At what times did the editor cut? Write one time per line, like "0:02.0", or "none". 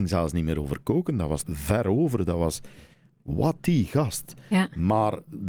0:01.4
0:03.6